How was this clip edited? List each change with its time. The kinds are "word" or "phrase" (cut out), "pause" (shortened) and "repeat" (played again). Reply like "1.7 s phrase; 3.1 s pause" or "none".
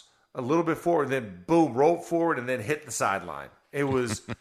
none